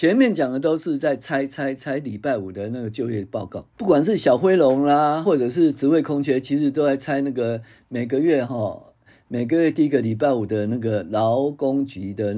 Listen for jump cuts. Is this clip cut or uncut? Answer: cut